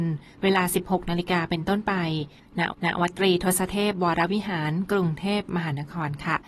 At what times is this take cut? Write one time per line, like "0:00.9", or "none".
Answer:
0:02.7